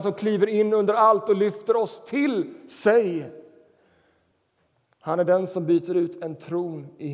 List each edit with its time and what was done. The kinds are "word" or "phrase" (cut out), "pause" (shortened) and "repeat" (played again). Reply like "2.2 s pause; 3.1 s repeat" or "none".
none